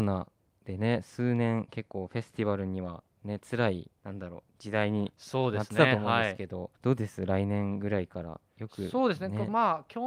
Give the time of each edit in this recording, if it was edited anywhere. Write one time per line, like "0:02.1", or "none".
0:04.0
0:06.8